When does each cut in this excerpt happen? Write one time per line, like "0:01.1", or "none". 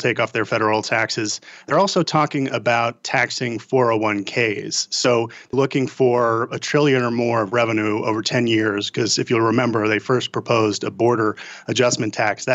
0:05.5